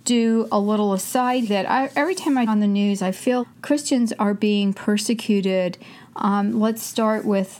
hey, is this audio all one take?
no; 3 cuts; at 1.5 s, 2.5 s, 3.4 s

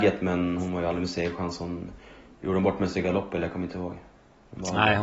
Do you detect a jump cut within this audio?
no; 0 cuts

